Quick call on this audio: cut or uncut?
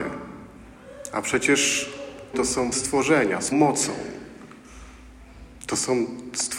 cut